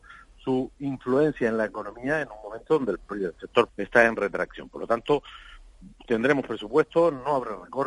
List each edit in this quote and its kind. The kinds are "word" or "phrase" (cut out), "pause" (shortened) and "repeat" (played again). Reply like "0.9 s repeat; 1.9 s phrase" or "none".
3.7 s word